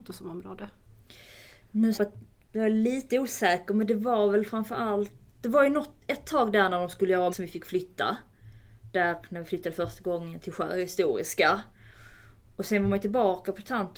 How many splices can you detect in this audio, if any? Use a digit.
5